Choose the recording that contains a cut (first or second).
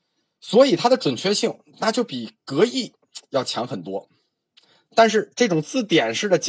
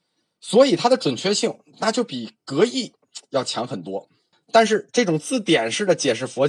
second